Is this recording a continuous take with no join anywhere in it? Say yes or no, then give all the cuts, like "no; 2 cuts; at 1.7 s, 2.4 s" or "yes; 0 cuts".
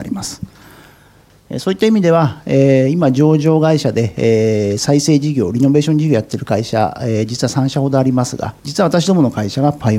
no; 1 cut; at 8.6 s